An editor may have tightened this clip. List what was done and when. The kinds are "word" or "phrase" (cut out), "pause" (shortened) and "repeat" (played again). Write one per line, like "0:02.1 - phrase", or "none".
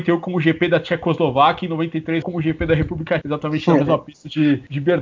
0:02.2 - word
0:03.2 - word